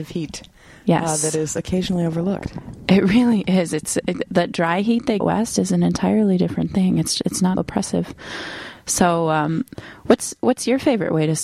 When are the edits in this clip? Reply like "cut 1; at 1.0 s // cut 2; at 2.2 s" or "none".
cut 1; at 5.2 s // cut 2; at 7.6 s